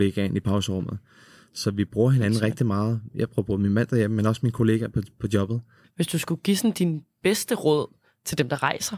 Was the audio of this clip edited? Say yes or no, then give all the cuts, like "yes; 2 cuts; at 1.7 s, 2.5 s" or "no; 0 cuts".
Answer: no; 0 cuts